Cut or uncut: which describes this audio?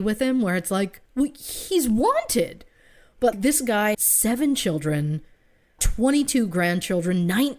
cut